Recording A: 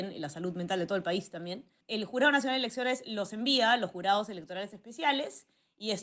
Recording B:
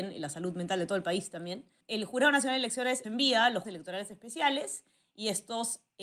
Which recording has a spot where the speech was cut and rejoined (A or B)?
B